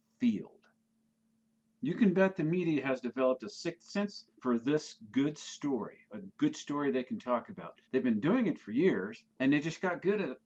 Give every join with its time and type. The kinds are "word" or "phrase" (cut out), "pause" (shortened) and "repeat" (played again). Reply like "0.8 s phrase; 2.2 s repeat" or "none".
4.3 s pause; 7.8 s pause; 9.3 s pause